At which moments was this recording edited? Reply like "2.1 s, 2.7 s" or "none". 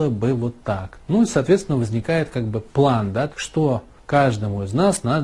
3.3 s, 4.0 s